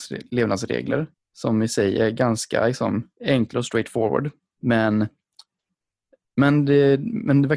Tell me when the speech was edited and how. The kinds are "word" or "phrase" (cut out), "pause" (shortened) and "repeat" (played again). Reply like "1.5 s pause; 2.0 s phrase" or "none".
1.1 s pause; 3.1 s pause; 4.4 s pause